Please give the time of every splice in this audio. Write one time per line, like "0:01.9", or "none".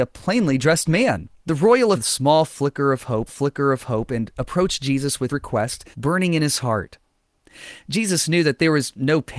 0:01.4
0:01.9
0:03.3
0:05.3
0:05.9